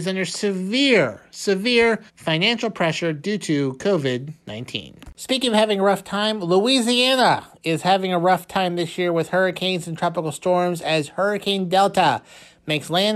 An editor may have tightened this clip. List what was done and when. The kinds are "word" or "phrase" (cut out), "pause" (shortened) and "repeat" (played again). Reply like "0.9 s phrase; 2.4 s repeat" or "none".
2.1 s pause